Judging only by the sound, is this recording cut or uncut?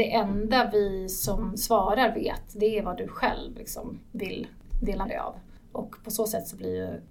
cut